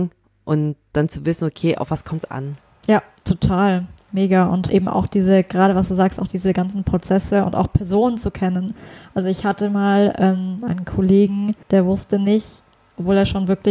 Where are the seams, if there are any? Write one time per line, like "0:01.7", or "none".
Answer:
0:02.3
0:02.6
0:04.7
0:11.6

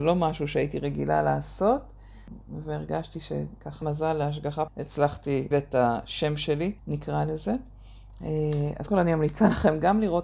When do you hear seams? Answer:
0:03.8
0:04.7
0:05.5
0:06.8
0:08.9

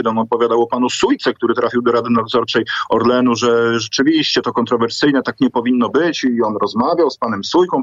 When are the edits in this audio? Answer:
none

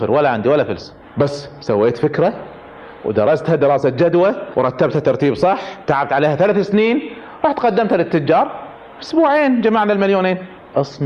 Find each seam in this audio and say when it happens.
none

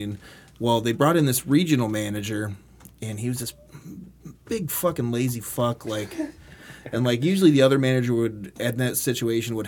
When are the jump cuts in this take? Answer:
none

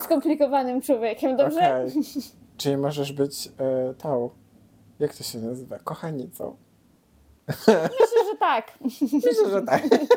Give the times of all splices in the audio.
none

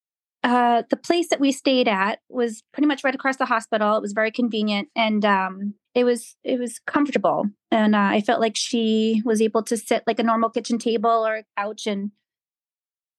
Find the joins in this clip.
0:05.8

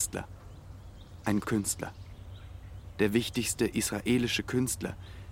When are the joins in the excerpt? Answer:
0:01.4

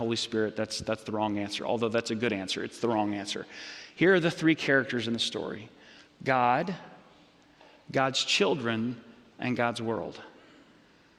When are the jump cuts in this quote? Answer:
none

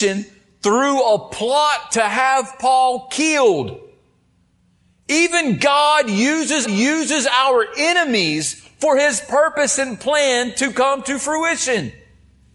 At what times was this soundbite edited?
0:06.6

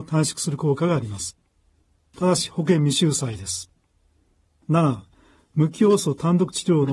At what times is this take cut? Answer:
none

